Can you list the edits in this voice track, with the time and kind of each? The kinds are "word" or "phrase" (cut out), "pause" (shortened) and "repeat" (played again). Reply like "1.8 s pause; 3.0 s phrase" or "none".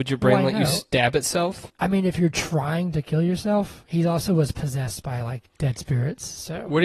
1.7 s pause